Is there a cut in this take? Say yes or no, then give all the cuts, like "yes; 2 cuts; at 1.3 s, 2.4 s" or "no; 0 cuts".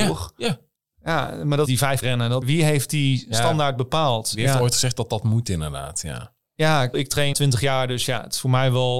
yes; 5 cuts; at 1.7 s, 2.0 s, 2.4 s, 6.9 s, 7.3 s